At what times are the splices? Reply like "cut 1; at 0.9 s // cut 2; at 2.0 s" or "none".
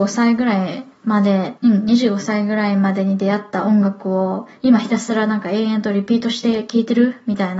cut 1; at 1.6 s